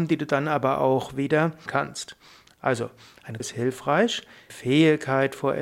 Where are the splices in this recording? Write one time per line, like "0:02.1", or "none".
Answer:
0:01.7
0:03.4
0:04.5